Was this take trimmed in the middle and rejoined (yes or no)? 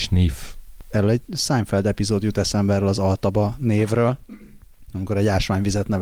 no